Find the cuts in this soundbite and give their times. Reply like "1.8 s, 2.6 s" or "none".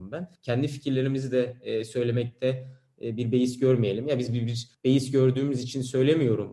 none